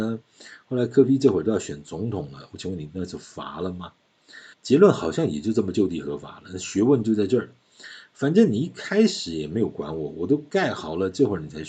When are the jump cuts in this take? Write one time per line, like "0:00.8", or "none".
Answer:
0:04.5